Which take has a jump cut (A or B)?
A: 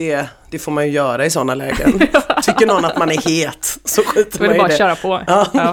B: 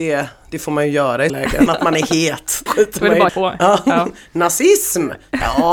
B